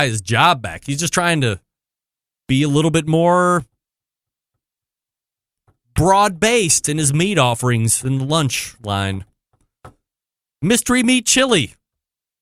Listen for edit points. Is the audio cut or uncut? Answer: uncut